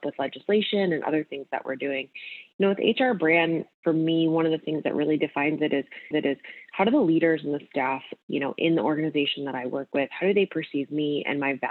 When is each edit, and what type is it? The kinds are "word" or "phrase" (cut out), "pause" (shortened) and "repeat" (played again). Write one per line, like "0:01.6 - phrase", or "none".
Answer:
0:06.1 - repeat